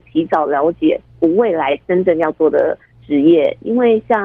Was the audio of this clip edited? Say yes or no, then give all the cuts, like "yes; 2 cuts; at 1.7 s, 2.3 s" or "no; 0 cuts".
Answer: no; 0 cuts